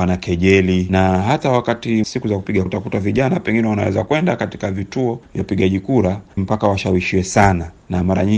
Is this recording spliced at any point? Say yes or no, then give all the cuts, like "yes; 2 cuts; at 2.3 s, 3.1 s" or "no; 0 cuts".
yes; 3 cuts; at 2.0 s, 2.7 s, 6.4 s